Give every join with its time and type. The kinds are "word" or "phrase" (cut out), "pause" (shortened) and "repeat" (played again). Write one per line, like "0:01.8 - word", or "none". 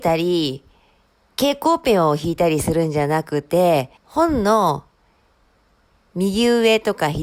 0:04.0 - pause